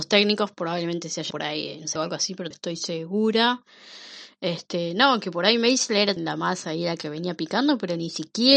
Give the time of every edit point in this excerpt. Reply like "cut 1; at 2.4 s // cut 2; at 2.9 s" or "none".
cut 1; at 1.3 s // cut 2; at 2.0 s // cut 3; at 2.5 s // cut 4; at 6.2 s